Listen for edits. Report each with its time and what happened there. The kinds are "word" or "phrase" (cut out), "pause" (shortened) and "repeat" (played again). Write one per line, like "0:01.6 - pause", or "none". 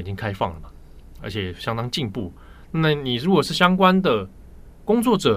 0:01.2 - word